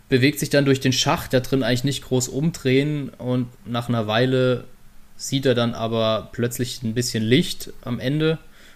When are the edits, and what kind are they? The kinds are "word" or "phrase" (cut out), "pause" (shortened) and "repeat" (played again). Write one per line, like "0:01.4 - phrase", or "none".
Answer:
0:01.3 - phrase
0:03.5 - word